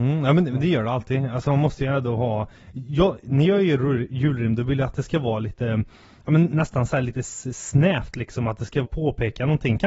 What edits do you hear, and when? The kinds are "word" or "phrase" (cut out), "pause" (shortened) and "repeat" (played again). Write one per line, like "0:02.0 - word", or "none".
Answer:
0:08.8 - word